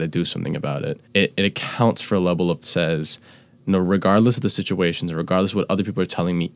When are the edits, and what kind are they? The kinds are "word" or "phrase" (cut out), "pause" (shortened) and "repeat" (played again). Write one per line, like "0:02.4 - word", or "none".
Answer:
0:01.0 - pause
0:02.6 - phrase